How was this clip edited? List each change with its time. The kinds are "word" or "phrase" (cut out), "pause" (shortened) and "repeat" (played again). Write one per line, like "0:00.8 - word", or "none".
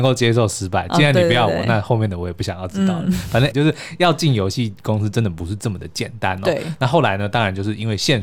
0:03.5 - word